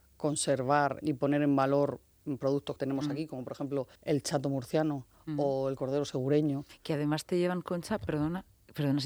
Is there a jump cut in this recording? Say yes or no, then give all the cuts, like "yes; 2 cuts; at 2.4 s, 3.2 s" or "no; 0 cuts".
yes; 3 cuts; at 1.0 s, 2.8 s, 4.0 s